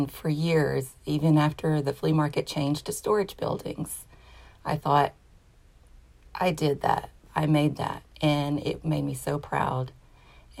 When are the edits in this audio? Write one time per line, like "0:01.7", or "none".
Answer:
0:08.1